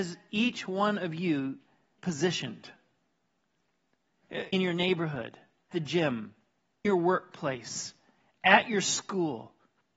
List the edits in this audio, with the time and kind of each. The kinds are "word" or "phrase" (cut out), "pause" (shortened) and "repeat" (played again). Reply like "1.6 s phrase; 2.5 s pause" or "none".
2.0 s word; 4.5 s word; 5.7 s word; 6.8 s word